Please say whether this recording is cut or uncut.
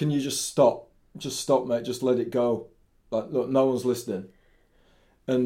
uncut